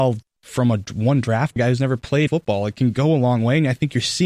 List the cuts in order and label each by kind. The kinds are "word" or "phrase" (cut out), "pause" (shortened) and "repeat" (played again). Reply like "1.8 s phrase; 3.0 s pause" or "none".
1.6 s phrase; 2.3 s word

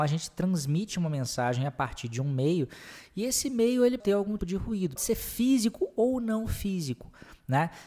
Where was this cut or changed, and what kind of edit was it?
4.0 s word; 4.4 s word; 5.0 s word

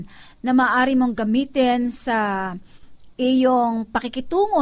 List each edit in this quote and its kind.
none

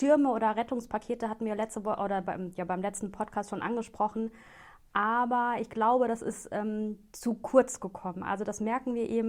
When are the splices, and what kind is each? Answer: none

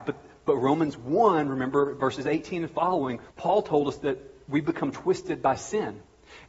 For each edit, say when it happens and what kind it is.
3.3 s pause

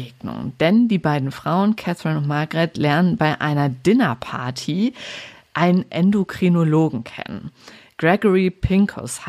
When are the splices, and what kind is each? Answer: none

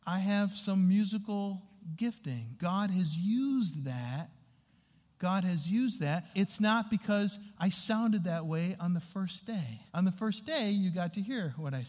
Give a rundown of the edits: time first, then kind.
2.6 s word; 6.3 s word; 9.9 s pause

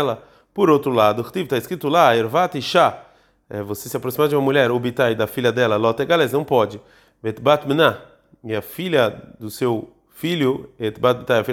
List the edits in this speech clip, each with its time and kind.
none

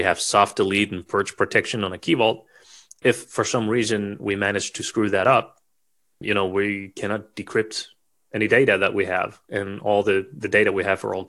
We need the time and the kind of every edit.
none

